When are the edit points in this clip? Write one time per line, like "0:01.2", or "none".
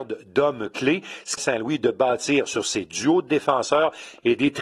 0:01.4